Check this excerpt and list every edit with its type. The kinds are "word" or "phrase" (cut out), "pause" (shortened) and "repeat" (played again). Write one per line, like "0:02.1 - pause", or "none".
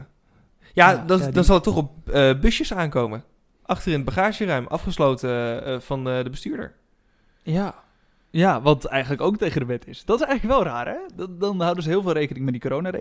none